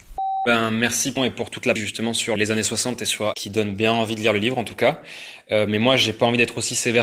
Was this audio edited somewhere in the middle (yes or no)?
yes